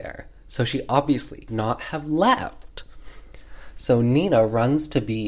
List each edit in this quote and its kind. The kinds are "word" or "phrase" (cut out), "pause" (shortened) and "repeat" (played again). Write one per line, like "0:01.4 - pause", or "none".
0:01.5 - word